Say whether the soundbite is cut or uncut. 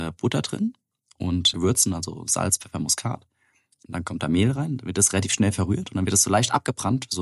cut